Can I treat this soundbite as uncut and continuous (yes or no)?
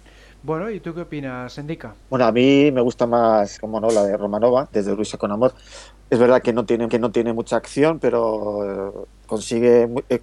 no